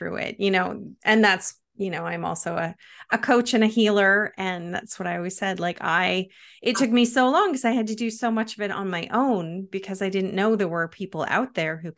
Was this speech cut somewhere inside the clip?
no; 0 cuts

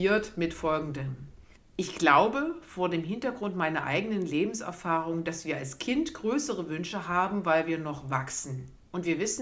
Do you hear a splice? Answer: yes; 1 cut; at 1.6 s

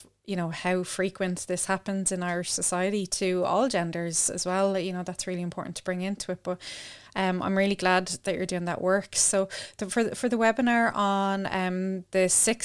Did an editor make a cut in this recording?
no; 0 cuts

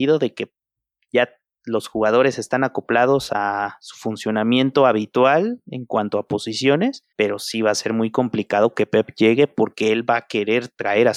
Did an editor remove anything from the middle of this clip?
yes; 1 cut; at 7.1 s

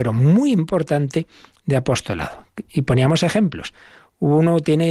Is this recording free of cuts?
yes; 0 cuts

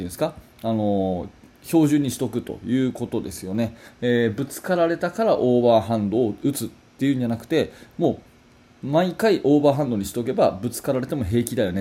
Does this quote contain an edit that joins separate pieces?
no; 0 cuts

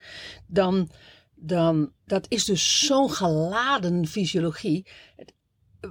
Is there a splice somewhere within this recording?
yes; 1 cut; at 2.0 s

